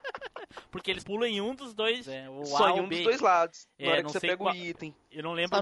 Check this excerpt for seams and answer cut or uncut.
cut